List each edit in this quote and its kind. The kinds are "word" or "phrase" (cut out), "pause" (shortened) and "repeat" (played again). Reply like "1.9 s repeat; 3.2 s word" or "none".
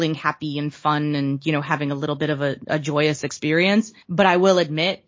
4.0 s pause